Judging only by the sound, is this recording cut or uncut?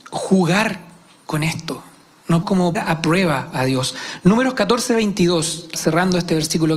cut